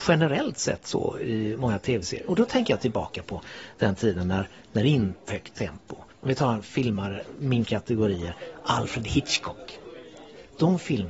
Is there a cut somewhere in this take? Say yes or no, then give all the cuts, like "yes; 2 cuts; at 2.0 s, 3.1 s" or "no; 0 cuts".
yes; 3 cuts; at 5.3 s, 6.1 s, 7.6 s